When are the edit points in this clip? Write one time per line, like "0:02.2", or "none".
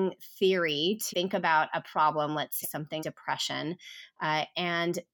0:01.1
0:02.6
0:03.0